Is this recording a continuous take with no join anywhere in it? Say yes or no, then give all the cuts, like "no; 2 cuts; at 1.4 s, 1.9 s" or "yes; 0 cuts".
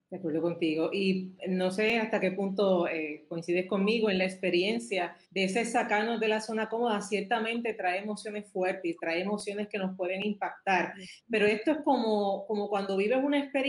no; 1 cut; at 5.2 s